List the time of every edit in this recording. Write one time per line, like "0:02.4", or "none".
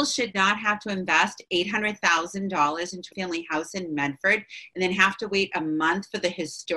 0:03.1

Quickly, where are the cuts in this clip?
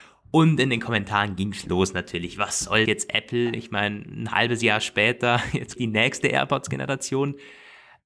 0:02.9
0:05.8

